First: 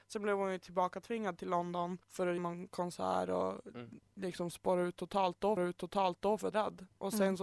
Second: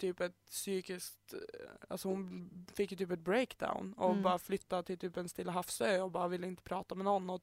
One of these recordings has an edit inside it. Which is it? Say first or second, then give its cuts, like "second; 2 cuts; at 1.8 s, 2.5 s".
first; 4 cuts; at 2.0 s, 2.4 s, 5.6 s, 6.5 s